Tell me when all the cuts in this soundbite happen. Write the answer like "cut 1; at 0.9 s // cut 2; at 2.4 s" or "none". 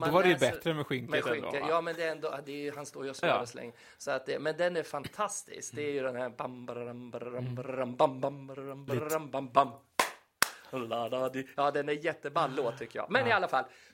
cut 1; at 3.2 s // cut 2; at 8.9 s